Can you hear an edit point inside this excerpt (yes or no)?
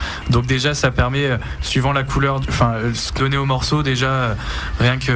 yes